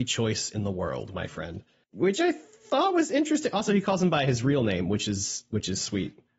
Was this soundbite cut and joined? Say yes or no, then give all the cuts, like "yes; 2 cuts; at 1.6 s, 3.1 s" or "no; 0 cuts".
no; 0 cuts